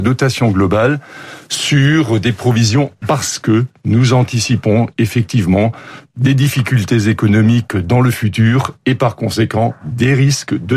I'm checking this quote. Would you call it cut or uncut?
cut